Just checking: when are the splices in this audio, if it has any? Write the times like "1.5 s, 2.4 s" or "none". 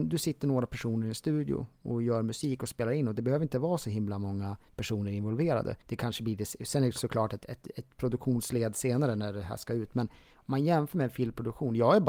5.8 s